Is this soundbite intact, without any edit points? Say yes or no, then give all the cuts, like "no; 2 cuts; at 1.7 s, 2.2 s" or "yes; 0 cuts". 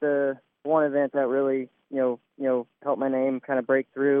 no; 1 cut; at 2.3 s